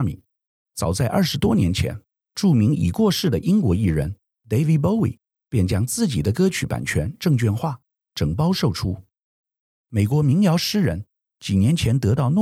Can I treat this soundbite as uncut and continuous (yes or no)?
yes